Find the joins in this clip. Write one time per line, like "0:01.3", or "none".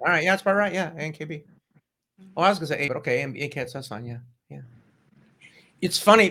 0:02.9

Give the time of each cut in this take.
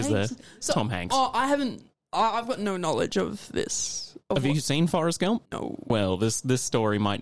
0:02.0
0:05.5

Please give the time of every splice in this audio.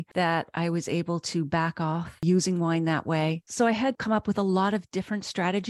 0:03.9

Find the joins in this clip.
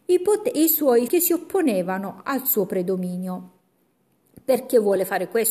0:01.1

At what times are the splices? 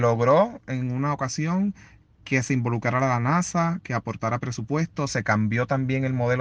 none

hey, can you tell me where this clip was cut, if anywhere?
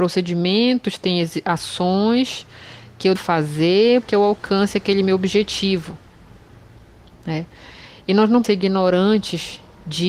0:03.2
0:04.0
0:08.4

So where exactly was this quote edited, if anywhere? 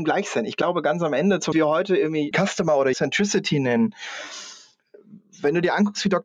0:01.5
0:02.3
0:02.9

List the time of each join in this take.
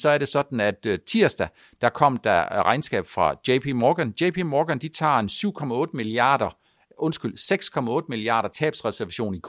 none

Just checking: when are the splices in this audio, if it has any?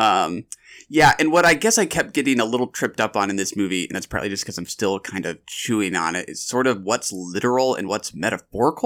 none

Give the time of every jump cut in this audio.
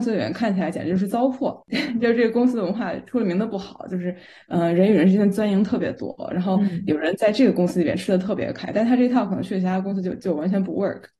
0:01.6

